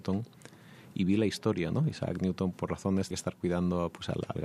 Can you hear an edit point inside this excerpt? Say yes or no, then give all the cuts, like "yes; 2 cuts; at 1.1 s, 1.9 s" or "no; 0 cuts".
yes; 2 cuts; at 2.5 s, 3.1 s